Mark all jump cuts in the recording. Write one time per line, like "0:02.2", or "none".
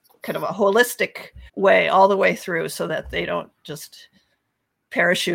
0:01.5